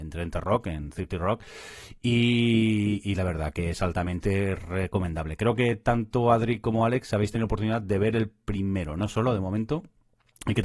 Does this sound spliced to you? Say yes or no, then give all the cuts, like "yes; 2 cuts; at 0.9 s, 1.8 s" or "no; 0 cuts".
no; 0 cuts